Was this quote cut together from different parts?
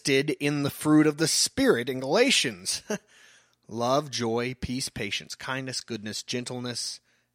no; 0 cuts

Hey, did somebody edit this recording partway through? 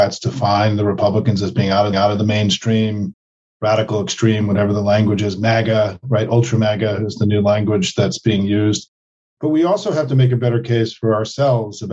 yes; 1 cut; at 1.9 s

